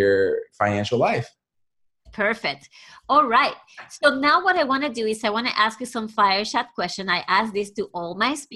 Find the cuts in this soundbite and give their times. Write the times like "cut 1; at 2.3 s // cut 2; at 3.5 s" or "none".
cut 1; at 2.1 s